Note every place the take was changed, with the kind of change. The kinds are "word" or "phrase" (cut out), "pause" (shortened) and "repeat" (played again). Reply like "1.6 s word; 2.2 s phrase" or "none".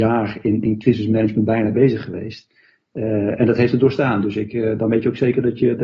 none

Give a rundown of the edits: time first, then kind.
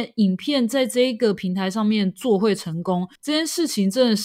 3.2 s pause

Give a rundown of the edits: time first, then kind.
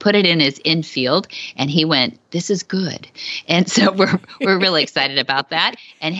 none

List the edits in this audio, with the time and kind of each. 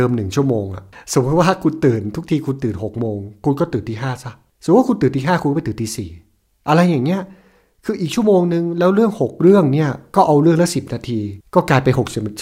none

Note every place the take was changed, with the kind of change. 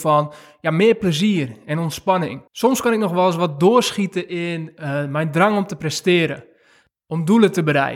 2.5 s pause

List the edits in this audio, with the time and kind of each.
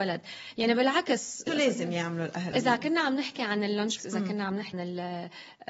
1.5 s word; 2.5 s word; 4.0 s word; 4.7 s word

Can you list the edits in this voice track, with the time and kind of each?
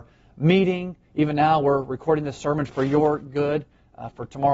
1.0 s pause

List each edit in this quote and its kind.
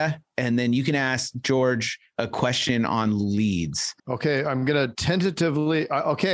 4.0 s pause

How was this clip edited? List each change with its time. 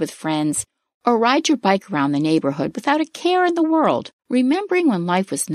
4.2 s pause

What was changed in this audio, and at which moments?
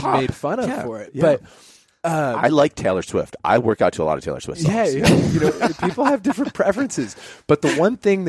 none

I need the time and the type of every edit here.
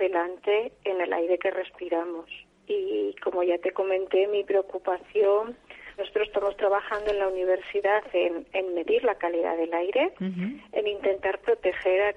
2.4 s pause; 6.0 s word

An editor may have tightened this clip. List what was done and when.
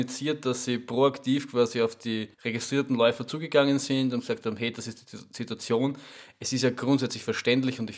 2.3 s pause

